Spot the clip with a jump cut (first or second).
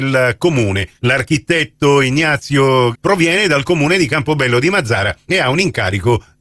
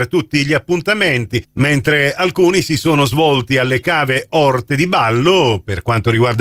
first